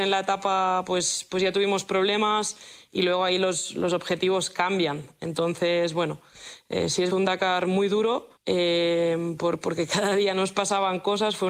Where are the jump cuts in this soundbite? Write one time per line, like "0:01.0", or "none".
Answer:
0:07.1
0:08.4